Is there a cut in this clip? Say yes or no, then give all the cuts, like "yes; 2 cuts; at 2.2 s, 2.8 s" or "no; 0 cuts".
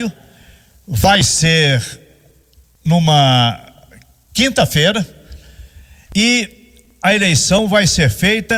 no; 0 cuts